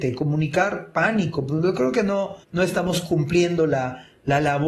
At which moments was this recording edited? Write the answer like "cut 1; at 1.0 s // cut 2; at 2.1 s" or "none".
cut 1; at 2.4 s